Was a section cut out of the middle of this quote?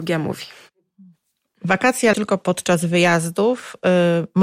yes; 1 cut; at 2.1 s

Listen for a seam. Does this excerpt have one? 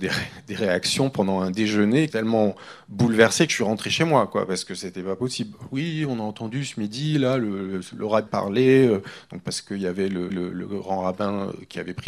yes; 3 cuts; at 2.1 s, 8.3 s, 10.3 s

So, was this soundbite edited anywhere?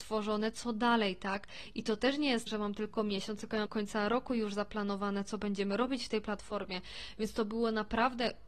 yes; 2 cuts; at 2.5 s, 3.7 s

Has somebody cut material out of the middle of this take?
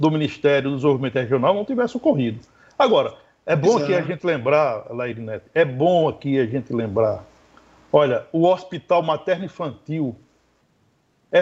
no; 0 cuts

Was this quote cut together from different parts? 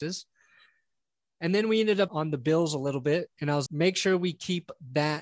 yes; 2 cuts; at 2.1 s, 3.7 s

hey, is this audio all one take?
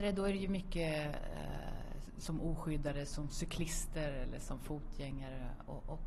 yes; 0 cuts

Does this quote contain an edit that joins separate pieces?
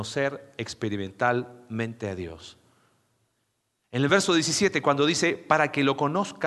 no; 0 cuts

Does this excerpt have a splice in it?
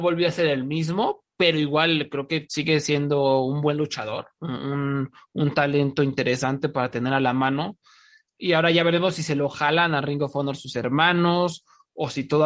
no; 0 cuts

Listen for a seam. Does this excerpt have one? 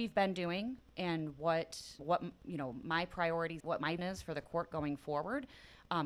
yes; 3 cuts; at 2.0 s, 3.6 s, 4.0 s

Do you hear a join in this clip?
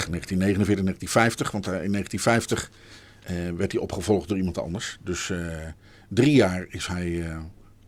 no; 0 cuts

